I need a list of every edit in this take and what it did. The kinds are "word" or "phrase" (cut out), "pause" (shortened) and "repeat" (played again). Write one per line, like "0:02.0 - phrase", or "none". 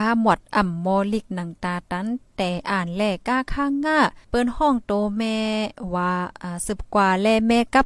0:04.2 - pause